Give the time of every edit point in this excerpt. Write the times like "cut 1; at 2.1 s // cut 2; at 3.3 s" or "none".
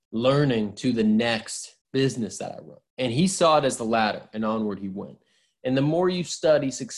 cut 1; at 1.8 s // cut 2; at 2.9 s